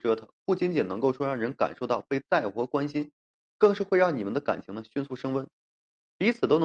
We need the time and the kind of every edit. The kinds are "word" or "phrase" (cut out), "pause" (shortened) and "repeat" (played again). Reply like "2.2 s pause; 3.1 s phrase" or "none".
none